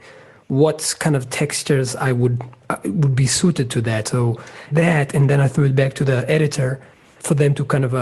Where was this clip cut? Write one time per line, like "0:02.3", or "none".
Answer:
0:04.7